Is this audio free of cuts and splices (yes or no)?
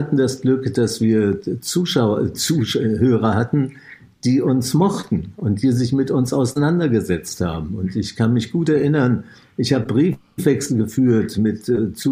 yes